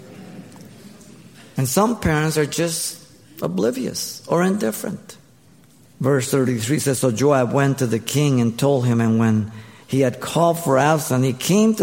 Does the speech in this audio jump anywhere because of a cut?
no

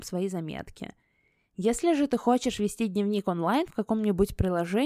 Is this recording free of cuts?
yes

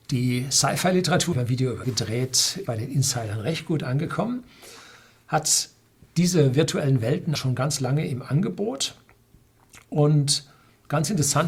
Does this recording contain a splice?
yes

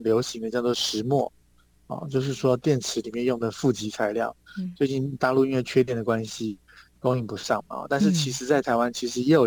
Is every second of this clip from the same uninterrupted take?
yes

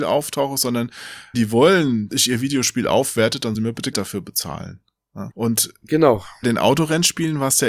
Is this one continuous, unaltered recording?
no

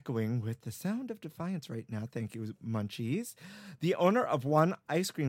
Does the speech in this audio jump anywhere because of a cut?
no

